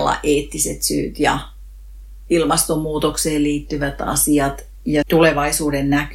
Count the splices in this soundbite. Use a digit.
1